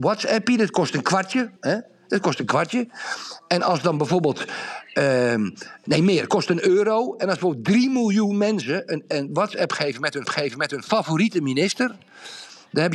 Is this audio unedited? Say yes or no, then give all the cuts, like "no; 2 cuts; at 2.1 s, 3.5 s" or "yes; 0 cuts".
no; 3 cuts; at 1.6 s, 5.8 s, 10.3 s